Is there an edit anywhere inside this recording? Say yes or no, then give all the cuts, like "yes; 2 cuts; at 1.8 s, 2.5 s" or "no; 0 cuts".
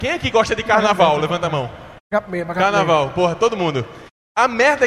no; 0 cuts